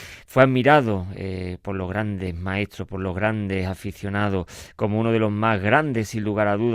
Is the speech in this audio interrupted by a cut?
no; 0 cuts

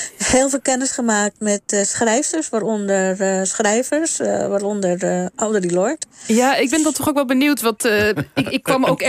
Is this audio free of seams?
yes; 0 cuts

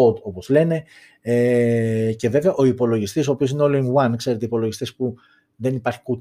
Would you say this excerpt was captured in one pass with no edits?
yes; 0 cuts

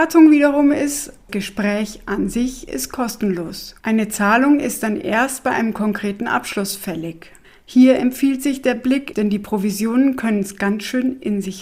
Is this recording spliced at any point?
yes; 4 cuts; at 1.3 s, 3.8 s, 7.4 s, 9.1 s

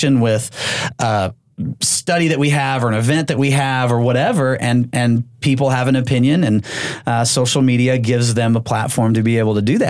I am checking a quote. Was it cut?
no; 0 cuts

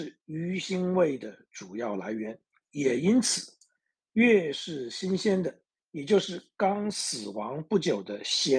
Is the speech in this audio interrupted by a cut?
yes; 2 cuts; at 2.5 s, 5.7 s

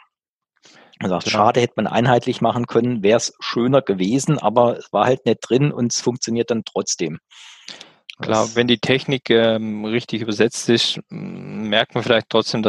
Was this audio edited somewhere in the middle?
no; 0 cuts

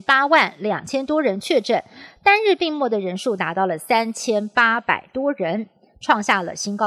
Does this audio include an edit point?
no; 0 cuts

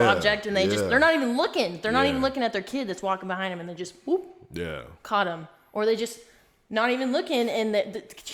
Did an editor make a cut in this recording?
no; 0 cuts

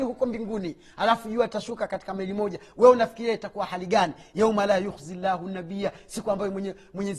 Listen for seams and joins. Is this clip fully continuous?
yes; 0 cuts

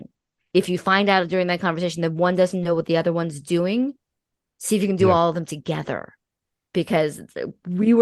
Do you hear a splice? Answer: no; 0 cuts

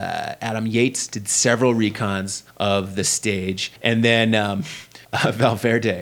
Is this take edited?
yes; 3 cuts; at 2.5 s, 3.8 s, 5.0 s

